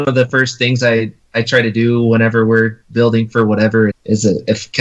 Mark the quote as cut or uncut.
cut